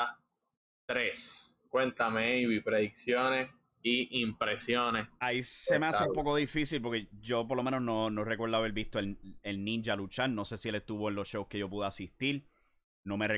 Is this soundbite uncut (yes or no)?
yes